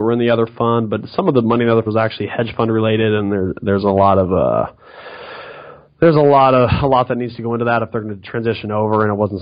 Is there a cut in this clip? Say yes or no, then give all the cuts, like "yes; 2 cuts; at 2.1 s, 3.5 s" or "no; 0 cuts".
yes; 1 cut; at 1.9 s